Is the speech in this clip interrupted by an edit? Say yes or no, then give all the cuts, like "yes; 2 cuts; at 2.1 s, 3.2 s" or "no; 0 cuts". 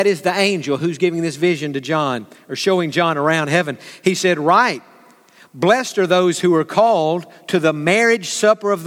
no; 0 cuts